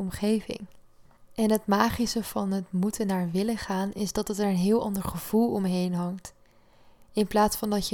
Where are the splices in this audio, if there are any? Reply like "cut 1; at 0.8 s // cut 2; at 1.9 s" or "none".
none